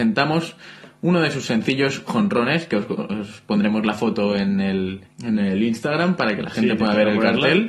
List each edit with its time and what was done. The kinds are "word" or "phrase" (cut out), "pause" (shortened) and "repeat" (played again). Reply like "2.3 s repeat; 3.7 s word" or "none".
5.1 s pause

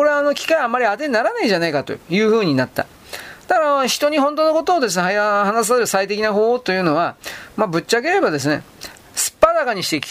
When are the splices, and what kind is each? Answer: none

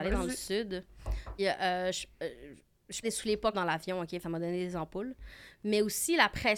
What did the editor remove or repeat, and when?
1.4 s word; 3.0 s word; 3.5 s word; 4.2 s word

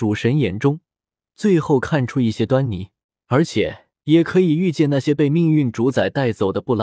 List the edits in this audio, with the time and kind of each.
3.0 s pause

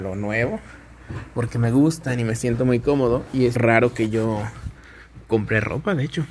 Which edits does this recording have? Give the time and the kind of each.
3.6 s word; 5.2 s pause

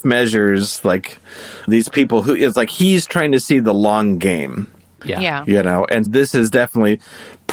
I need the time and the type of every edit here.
1.7 s word; 6.1 s word

